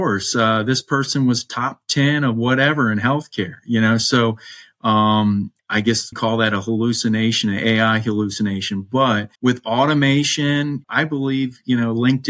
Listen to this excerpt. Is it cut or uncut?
cut